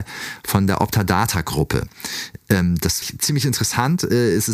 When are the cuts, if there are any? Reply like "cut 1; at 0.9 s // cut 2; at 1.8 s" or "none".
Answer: cut 1; at 3.0 s

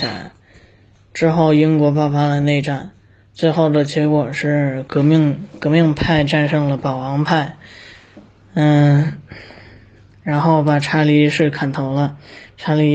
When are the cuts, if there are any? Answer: none

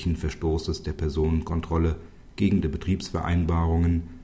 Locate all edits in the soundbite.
cut 1; at 2.6 s

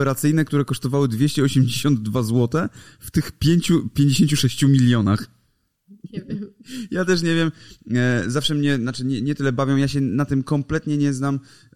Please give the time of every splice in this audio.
none

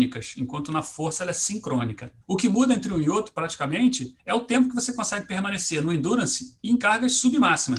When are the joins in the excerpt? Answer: cut 1; at 2.2 s // cut 2; at 4.2 s

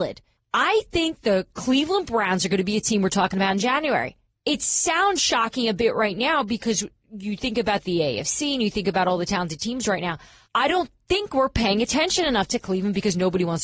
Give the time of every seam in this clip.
none

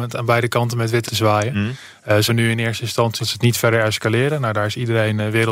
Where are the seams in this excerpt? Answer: cut 1; at 1.1 s // cut 2; at 2.3 s // cut 3; at 3.2 s

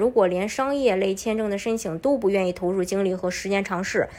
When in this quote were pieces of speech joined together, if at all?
none

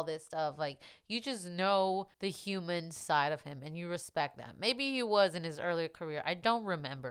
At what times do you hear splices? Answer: cut 1; at 2.1 s

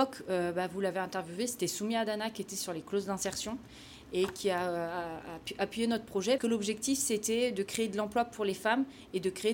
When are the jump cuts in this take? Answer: cut 1; at 6.4 s

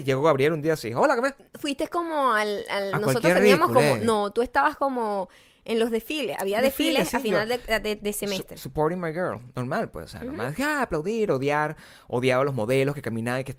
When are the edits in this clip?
none

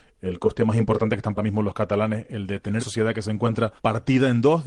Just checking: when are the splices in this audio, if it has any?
cut 1; at 1.4 s // cut 2; at 2.8 s // cut 3; at 3.8 s

